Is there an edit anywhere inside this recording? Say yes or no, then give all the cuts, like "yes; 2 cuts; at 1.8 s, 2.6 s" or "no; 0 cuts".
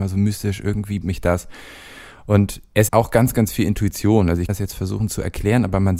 yes; 3 cuts; at 1.0 s, 2.9 s, 4.5 s